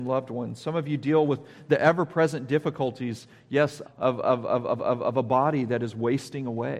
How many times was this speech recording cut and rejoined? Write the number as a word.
two